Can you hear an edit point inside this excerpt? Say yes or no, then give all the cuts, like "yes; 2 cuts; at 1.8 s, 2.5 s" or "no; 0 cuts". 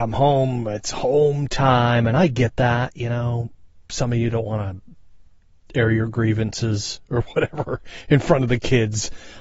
no; 0 cuts